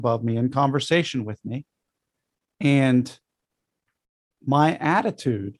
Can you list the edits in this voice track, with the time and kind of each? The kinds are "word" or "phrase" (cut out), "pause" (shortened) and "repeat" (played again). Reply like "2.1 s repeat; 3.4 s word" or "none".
none

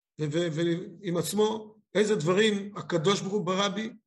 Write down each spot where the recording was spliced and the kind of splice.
none

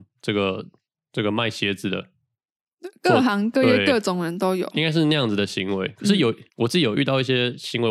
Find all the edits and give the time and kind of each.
6.5 s pause

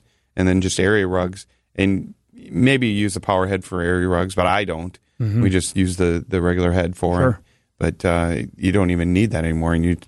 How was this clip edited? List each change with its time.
none

